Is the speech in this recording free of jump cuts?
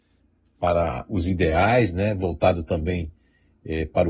yes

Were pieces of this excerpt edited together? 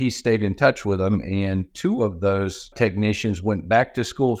no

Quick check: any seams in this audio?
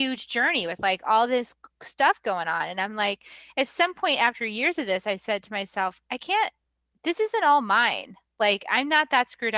no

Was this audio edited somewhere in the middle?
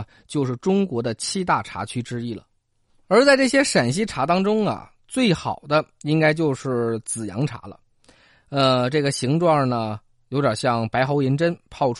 no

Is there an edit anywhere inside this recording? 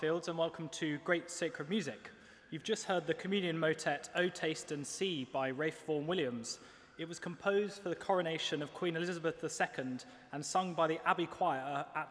no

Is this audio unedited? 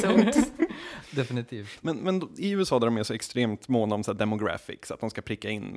yes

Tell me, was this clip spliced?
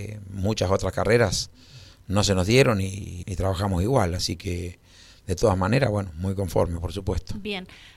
yes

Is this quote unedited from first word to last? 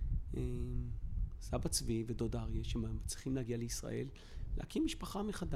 yes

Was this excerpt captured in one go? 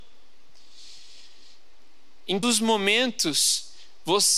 no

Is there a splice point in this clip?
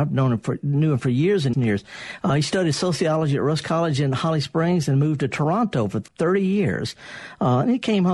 yes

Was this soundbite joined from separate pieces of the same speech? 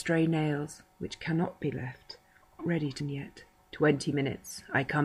yes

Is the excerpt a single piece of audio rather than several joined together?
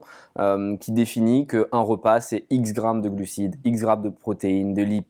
yes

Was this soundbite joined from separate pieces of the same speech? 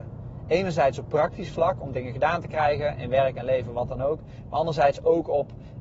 no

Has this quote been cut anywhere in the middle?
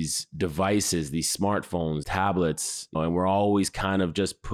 yes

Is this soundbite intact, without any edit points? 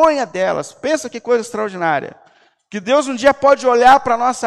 yes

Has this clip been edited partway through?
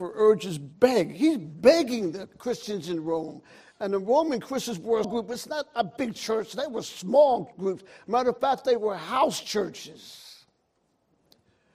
yes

